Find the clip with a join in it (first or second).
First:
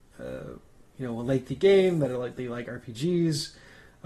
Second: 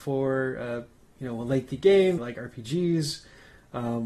second